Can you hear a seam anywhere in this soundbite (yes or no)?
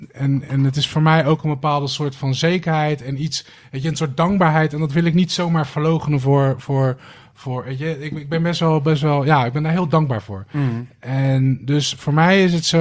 no